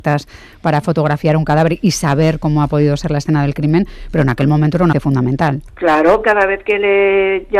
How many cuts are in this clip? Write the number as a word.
two